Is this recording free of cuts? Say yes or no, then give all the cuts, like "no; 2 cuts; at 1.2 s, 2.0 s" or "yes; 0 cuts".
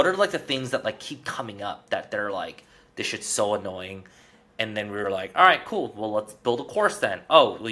yes; 0 cuts